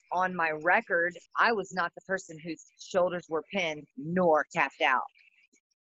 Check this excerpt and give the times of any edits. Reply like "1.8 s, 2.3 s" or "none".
1.3 s, 3.9 s

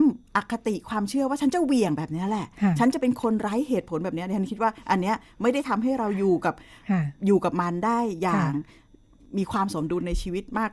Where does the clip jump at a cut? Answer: none

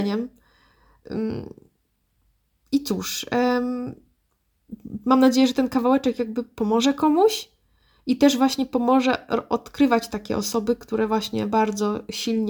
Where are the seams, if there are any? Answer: none

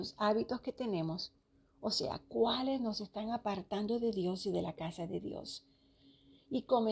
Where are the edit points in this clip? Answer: none

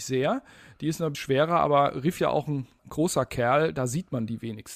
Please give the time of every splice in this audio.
1.1 s, 2.2 s, 2.8 s

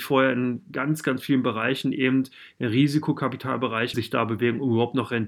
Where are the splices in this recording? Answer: 3.9 s

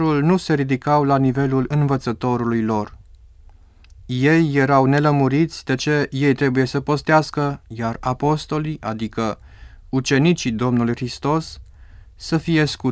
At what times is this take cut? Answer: none

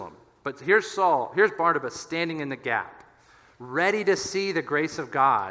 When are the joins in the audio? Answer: none

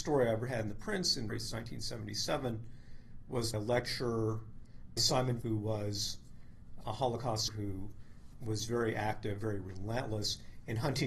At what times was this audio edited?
1.3 s, 3.5 s, 5.0 s, 5.4 s, 6.8 s, 7.5 s, 8.3 s

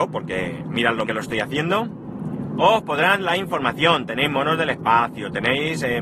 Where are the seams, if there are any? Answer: 1.0 s, 3.2 s

